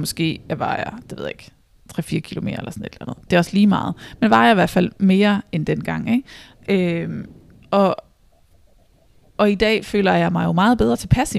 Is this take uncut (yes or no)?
yes